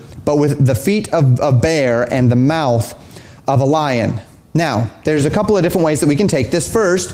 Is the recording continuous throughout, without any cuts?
yes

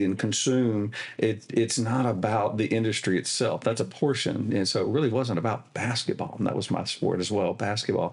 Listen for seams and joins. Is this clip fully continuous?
yes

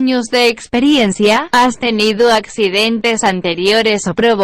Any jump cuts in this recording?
no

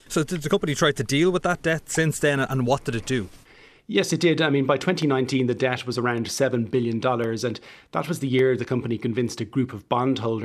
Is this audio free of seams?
yes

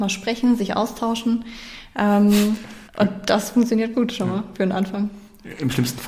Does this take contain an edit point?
yes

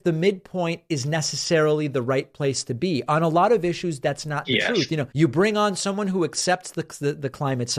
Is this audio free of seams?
no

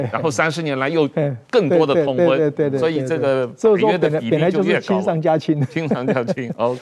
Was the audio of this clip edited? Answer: yes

